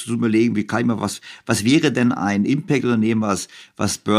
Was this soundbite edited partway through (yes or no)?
no